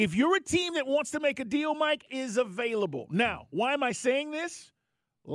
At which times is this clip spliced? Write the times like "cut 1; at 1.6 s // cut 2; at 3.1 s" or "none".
cut 1; at 2.1 s